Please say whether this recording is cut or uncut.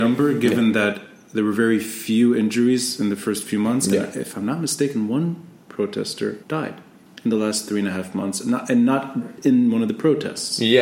cut